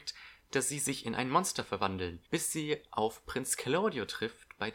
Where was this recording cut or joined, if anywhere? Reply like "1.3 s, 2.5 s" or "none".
2.3 s